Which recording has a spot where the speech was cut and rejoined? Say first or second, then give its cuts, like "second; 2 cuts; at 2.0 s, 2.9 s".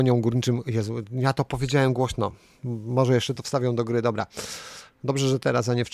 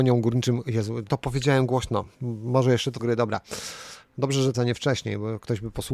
second; 4 cuts; at 1.1 s, 2.1 s, 3.0 s, 4.5 s